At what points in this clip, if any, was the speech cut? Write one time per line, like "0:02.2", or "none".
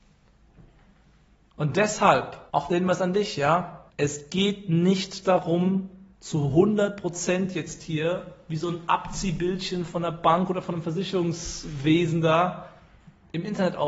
0:02.5
0:03.9
0:06.1